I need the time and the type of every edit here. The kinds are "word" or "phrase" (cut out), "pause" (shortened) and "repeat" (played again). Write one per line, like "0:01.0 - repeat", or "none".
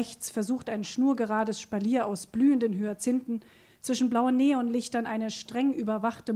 none